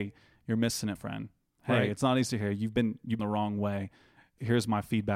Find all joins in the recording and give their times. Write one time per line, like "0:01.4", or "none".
0:01.0
0:03.2